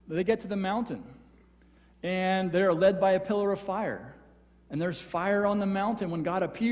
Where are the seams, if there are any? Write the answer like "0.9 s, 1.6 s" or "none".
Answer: none